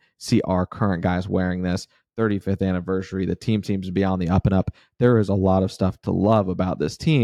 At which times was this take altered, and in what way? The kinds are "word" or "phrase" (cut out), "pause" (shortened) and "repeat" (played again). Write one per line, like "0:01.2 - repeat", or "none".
none